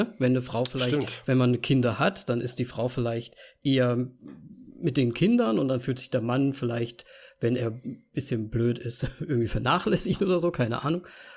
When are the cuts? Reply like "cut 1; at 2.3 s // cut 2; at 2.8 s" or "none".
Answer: none